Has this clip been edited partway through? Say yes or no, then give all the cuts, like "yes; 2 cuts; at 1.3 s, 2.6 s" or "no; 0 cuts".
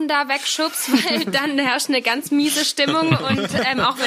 no; 0 cuts